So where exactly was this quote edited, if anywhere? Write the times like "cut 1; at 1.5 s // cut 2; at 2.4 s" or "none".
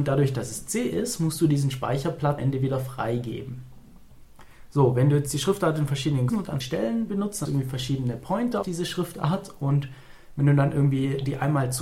cut 1; at 2.4 s // cut 2; at 6.3 s // cut 3; at 6.6 s // cut 4; at 7.5 s // cut 5; at 8.6 s